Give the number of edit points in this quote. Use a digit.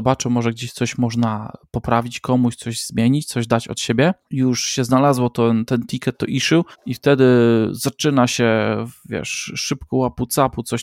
2